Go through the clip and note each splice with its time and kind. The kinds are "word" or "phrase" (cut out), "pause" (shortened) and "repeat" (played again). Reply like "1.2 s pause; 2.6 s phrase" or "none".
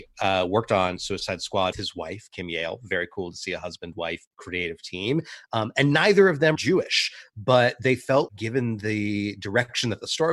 1.7 s word; 4.3 s pause; 6.5 s word; 8.3 s word